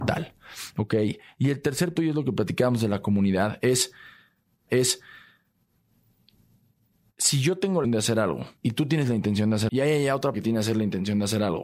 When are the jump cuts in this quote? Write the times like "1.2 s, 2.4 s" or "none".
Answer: 2.0 s, 4.7 s, 7.8 s, 8.6 s, 9.7 s, 10.3 s